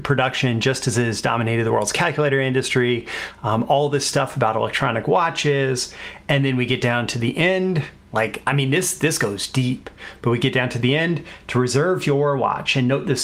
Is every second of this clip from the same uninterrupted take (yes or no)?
yes